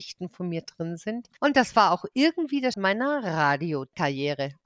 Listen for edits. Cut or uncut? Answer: cut